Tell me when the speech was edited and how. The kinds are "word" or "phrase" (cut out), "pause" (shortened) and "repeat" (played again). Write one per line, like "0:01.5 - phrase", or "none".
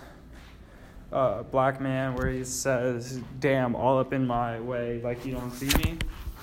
none